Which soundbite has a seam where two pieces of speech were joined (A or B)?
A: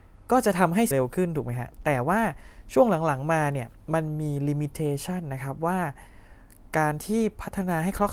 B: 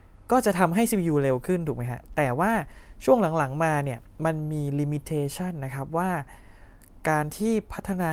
A